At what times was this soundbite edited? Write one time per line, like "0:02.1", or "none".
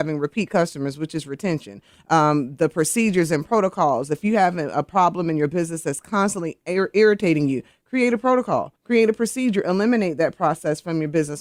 0:08.8